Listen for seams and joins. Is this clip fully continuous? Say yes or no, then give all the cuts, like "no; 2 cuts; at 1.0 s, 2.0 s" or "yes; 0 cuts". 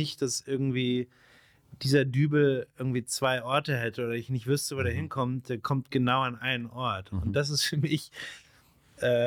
yes; 0 cuts